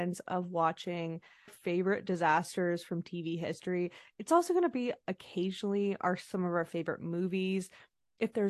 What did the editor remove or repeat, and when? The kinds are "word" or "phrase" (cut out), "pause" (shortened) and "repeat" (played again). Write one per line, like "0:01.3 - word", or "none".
0:01.5 - phrase